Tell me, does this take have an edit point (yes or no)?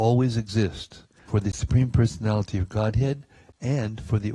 yes